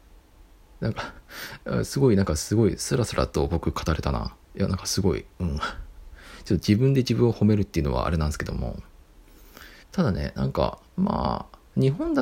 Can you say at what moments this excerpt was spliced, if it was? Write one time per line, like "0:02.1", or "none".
0:09.8
0:10.9